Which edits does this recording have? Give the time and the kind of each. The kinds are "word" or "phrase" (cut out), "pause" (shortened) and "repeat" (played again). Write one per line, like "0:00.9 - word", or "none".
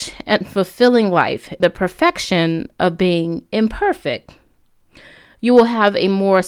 0:01.6 - word